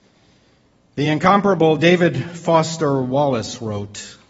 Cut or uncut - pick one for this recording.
uncut